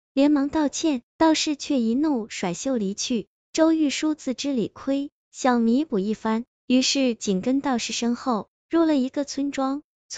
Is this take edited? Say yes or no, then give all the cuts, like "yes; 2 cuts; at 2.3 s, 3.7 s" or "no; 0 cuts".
yes; 1 cut; at 1.1 s